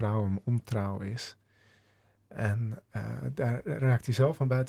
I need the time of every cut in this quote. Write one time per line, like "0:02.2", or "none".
0:02.9